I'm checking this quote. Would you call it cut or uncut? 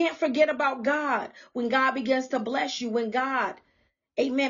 uncut